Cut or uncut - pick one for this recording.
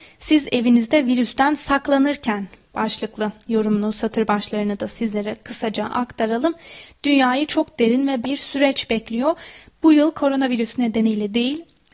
cut